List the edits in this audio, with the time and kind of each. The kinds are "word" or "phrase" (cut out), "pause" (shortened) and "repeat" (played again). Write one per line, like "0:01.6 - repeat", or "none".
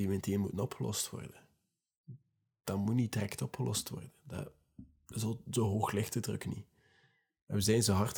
none

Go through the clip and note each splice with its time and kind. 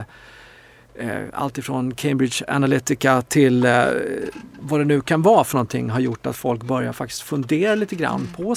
none

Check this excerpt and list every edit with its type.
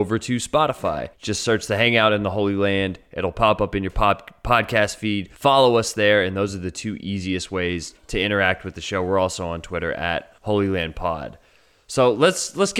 0:01.1 - pause
0:05.3 - pause
0:08.0 - pause
0:10.4 - pause

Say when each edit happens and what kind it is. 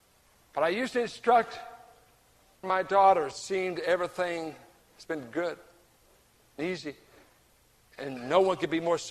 0:02.6 - word
0:03.3 - word
0:04.8 - word

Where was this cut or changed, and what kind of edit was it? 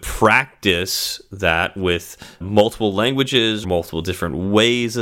0:02.4 - word
0:03.6 - word

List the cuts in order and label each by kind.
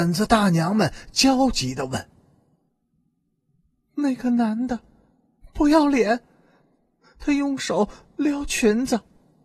none

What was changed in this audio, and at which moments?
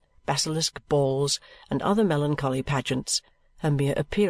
none

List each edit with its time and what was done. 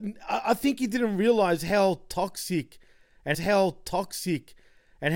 0:03.3 - repeat

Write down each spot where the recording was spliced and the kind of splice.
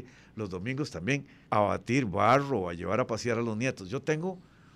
0:01.5 - pause

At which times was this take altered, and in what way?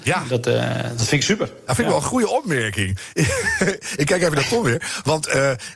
none

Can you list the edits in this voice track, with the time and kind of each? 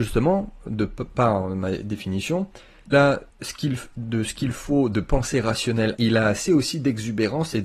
0:02.9 - word
0:03.3 - pause
0:06.0 - word

